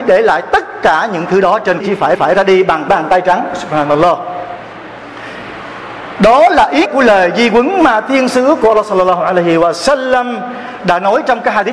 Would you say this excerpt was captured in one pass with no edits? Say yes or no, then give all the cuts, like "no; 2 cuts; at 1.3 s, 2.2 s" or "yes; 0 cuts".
no; 4 cuts; at 1.8 s, 2.2 s, 2.9 s, 6.9 s